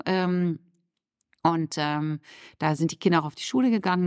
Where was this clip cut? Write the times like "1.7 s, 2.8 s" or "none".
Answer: none